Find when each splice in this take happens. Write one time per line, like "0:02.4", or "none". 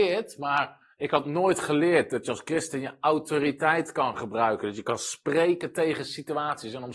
none